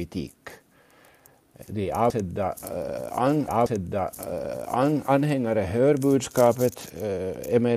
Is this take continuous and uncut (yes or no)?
no